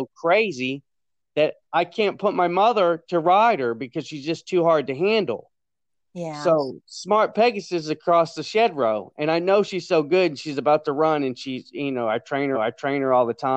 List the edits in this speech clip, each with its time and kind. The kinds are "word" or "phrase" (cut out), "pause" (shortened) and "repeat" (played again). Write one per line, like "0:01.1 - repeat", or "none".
0:12.5 - repeat